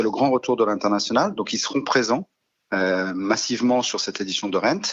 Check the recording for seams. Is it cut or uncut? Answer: uncut